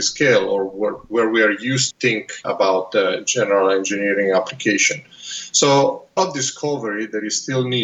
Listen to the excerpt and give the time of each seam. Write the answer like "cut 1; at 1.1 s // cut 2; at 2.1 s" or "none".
cut 1; at 1.9 s // cut 2; at 2.4 s // cut 3; at 6.2 s